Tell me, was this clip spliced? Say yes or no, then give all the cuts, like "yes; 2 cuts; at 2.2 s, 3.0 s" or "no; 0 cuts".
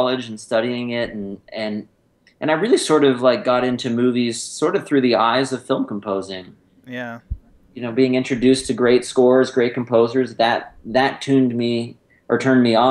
no; 0 cuts